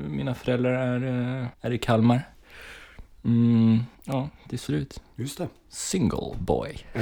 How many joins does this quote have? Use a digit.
3